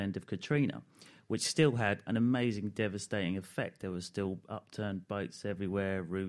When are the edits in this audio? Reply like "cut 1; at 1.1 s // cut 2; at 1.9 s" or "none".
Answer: cut 1; at 2.1 s

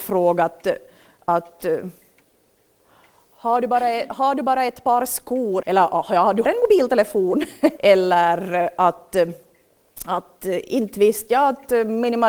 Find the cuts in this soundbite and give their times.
cut 1; at 5.6 s // cut 2; at 6.4 s // cut 3; at 7.8 s

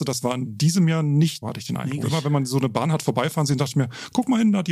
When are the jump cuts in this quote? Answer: cut 1; at 1.4 s // cut 2; at 2.0 s

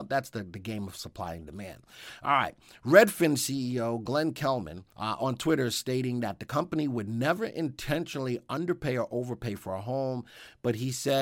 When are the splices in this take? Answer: cut 1; at 4.9 s

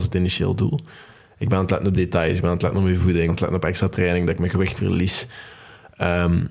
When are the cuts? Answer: cut 1; at 3.3 s // cut 2; at 4.8 s

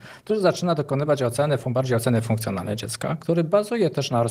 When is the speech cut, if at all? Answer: none

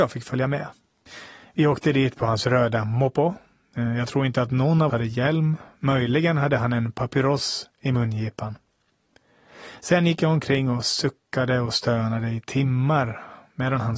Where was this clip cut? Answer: cut 1; at 4.9 s

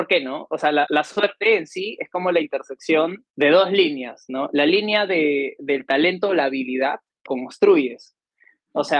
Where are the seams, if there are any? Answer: cut 1; at 3.3 s // cut 2; at 7.3 s

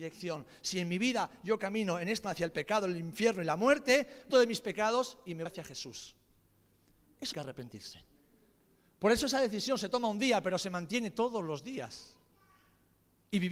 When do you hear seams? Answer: cut 1; at 2.2 s // cut 2; at 4.3 s // cut 3; at 5.5 s // cut 4; at 7.3 s

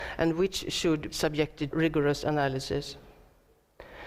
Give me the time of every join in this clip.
cut 1; at 1.1 s // cut 2; at 1.7 s

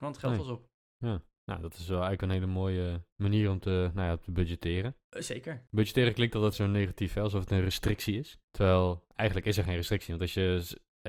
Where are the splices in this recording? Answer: cut 1; at 3.1 s // cut 2; at 6.5 s // cut 3; at 8.4 s

